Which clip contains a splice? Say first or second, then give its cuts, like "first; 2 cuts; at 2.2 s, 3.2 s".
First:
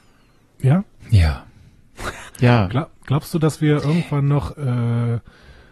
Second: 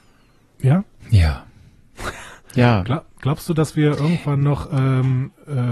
first; 2 cuts; at 2.3 s, 4.5 s